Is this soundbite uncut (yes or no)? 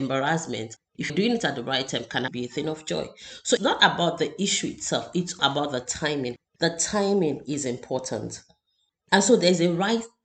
no